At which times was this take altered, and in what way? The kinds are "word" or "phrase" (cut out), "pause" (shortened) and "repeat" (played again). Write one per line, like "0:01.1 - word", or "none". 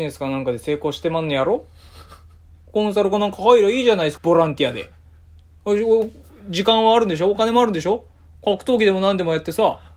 0:04.2 - phrase